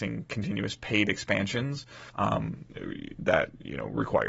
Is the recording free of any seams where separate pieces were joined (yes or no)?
no